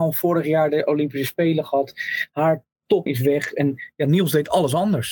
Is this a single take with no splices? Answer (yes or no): no